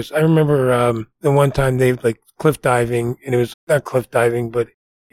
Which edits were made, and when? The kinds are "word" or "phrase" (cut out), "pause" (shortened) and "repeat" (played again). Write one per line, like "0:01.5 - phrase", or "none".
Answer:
0:01.1 - pause
0:03.5 - word